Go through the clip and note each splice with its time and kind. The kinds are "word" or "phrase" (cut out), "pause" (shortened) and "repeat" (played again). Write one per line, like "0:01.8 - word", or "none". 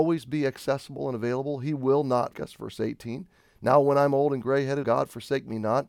0:02.3 - word
0:04.8 - word